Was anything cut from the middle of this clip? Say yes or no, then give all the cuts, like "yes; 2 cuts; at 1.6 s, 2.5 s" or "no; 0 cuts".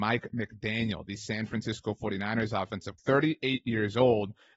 yes; 1 cut; at 3.0 s